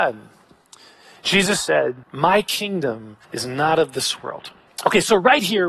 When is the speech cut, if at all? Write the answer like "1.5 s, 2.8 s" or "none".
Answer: 2.0 s, 3.2 s, 4.7 s